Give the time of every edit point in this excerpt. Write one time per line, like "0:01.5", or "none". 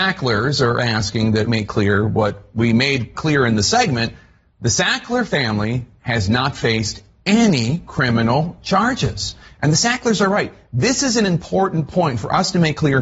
0:01.5
0:03.1